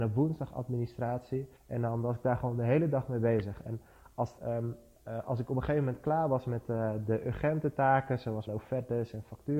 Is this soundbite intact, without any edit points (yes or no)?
no